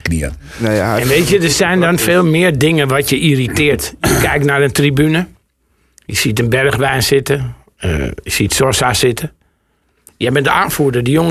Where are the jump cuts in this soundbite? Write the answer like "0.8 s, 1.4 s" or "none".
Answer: none